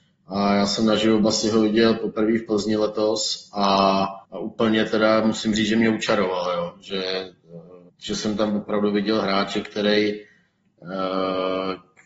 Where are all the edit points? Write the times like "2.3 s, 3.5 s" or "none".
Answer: 4.2 s, 7.9 s